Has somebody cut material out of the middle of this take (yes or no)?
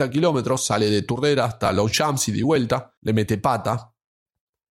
yes